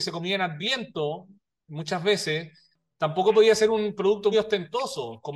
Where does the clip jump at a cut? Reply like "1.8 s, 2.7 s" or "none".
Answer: 4.3 s